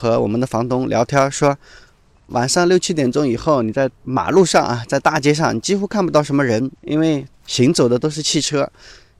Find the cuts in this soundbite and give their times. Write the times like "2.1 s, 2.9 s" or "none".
2.3 s, 3.9 s, 6.7 s